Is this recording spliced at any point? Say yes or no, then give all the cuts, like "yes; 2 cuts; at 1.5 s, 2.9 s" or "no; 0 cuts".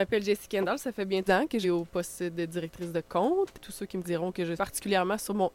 yes; 4 cuts; at 1.3 s, 1.6 s, 4.0 s, 4.5 s